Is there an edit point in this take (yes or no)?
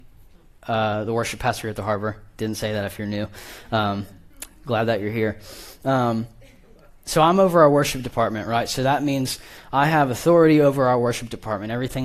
no